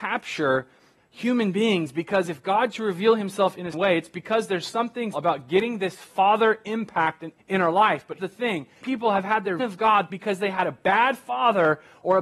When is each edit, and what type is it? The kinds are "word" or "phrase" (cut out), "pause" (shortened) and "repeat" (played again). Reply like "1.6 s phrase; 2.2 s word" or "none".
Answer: 1.0 s word; 2.7 s word; 3.7 s word; 5.1 s word; 7.4 s word; 8.2 s word; 8.8 s word; 9.6 s word; 10.1 s word

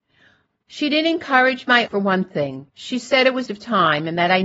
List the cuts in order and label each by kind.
1.9 s word; 2.7 s pause; 3.5 s phrase

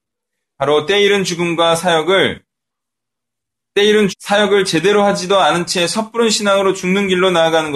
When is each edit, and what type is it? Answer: 4.1 s word

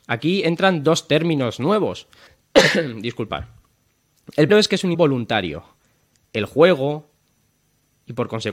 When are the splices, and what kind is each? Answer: 2.3 s pause; 4.5 s word; 4.9 s word

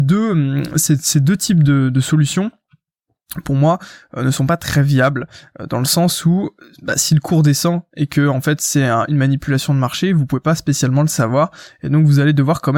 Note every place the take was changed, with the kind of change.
none

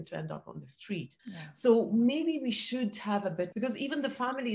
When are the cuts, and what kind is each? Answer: 1.2 s pause; 3.5 s phrase

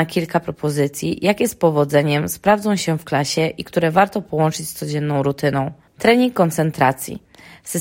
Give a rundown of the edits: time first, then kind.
none

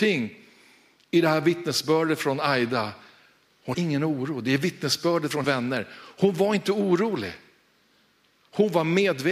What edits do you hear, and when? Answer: 3.7 s word; 5.4 s word

